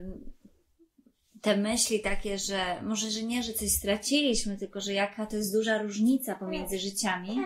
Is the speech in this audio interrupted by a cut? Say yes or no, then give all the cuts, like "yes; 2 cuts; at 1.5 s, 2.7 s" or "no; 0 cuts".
no; 0 cuts